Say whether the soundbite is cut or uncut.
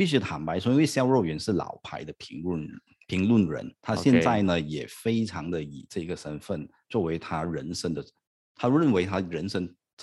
uncut